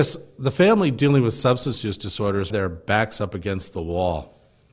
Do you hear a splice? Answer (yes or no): yes